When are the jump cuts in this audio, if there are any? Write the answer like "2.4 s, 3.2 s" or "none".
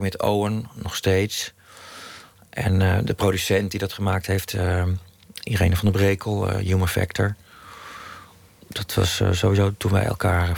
none